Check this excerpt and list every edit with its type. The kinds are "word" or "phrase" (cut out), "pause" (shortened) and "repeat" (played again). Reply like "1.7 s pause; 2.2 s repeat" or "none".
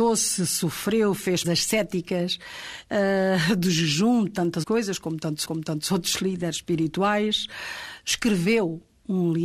1.4 s word; 4.6 s word; 5.4 s repeat

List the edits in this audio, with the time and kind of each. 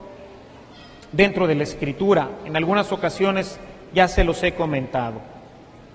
none

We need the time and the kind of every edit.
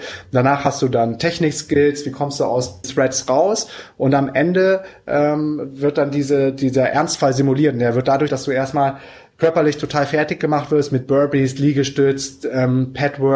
2.8 s word; 8.3 s word

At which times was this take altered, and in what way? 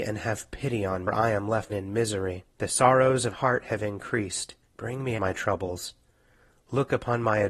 1.1 s phrase; 1.7 s phrase; 2.5 s pause; 3.3 s word; 4.6 s pause; 5.2 s phrase

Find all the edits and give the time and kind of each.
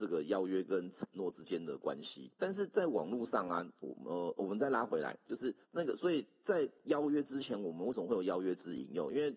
2.3 s pause; 4.4 s word; 5.6 s pause

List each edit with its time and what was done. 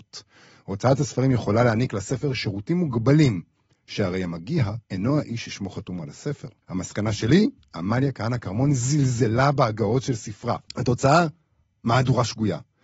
4.8 s pause; 6.6 s pause; 7.6 s pause; 10.7 s pause

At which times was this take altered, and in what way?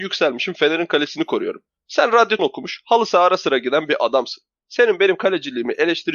2.4 s word

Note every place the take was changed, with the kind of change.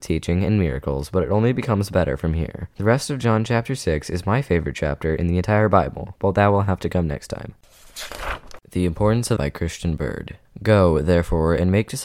9.4 s word

